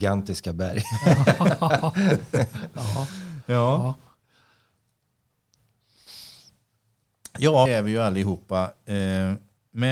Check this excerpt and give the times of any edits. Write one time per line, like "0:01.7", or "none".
0:07.7